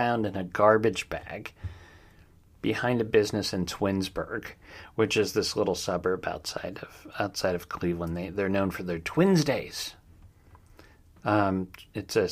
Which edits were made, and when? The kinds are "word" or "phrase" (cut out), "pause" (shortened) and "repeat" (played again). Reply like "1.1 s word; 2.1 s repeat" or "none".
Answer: none